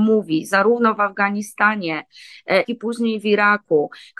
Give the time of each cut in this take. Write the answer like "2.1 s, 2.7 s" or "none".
2.6 s